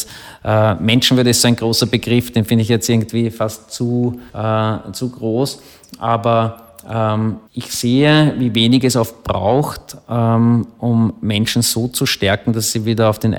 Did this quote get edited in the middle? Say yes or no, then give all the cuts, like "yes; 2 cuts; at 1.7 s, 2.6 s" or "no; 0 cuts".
yes; 2 cuts; at 4.3 s, 7.5 s